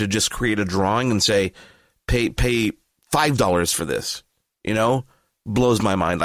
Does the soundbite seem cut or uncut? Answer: uncut